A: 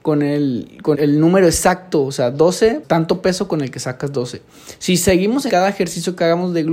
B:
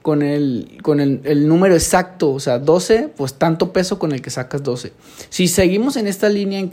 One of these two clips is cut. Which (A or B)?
A